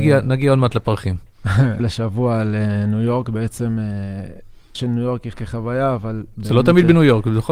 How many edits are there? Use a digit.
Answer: 3